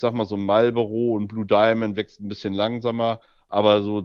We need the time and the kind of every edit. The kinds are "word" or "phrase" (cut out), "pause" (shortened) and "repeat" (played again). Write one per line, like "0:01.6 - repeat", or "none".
none